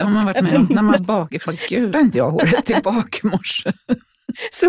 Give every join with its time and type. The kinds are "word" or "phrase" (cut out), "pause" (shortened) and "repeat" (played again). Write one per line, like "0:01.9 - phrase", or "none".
0:01.0 - word
0:01.5 - word
0:01.9 - word